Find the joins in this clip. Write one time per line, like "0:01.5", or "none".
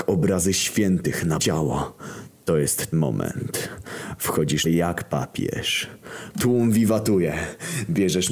0:01.4
0:02.9
0:04.7